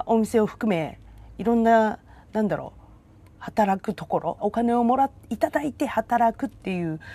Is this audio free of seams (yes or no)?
no